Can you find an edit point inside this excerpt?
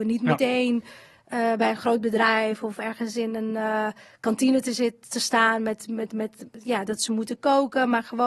no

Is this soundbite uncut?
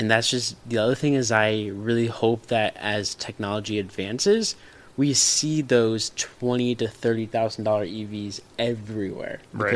yes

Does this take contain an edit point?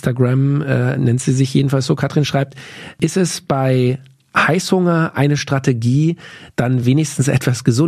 no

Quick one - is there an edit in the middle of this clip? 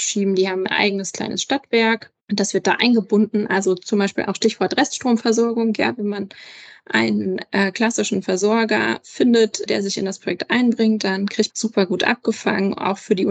yes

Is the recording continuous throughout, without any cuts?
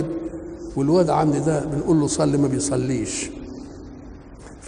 no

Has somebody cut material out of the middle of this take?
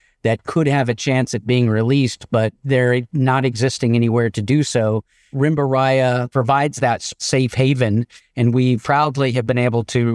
no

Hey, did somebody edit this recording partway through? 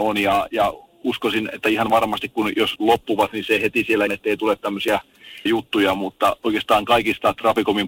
yes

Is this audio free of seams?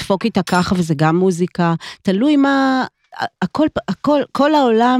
yes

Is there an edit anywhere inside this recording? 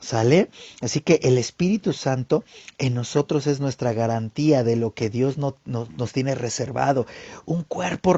no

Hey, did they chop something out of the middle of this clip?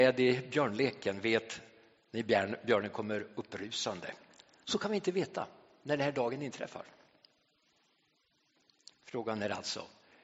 no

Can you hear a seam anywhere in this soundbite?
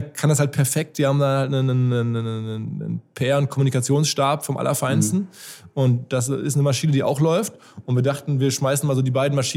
no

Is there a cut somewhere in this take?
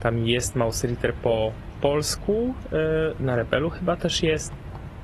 no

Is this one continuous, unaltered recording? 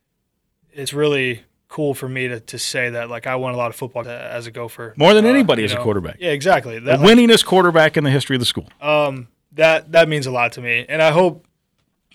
no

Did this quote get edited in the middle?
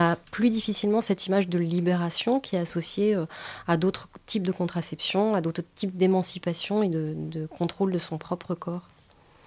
no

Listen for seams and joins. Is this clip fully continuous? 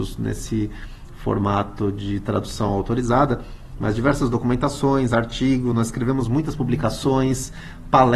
yes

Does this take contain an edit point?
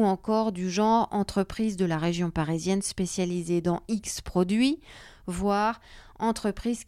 no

